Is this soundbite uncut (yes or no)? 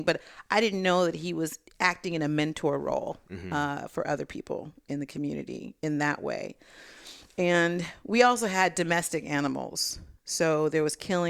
no